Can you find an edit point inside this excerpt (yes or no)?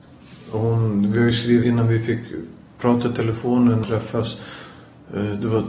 yes